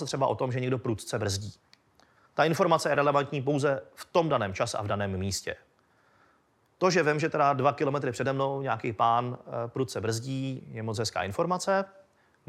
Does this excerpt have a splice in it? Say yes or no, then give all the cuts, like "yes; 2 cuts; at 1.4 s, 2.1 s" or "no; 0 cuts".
no; 0 cuts